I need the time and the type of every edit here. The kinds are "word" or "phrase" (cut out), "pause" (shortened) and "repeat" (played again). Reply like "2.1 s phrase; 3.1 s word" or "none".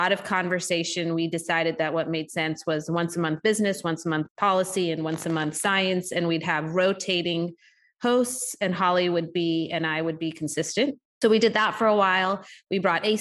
11.2 s word